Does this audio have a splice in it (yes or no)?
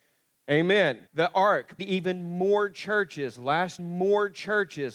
yes